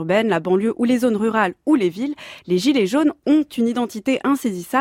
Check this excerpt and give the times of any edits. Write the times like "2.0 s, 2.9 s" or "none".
none